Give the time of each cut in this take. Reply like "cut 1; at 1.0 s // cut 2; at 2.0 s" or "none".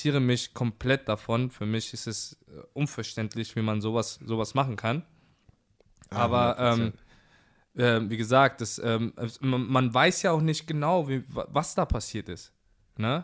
none